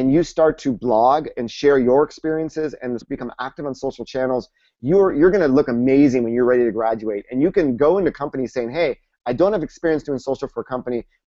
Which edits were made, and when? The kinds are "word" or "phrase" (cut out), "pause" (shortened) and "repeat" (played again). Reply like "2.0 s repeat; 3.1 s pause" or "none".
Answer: 3.0 s word